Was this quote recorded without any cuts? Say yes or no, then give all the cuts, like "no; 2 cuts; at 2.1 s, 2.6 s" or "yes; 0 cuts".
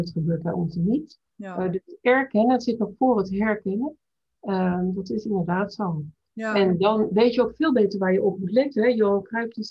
yes; 0 cuts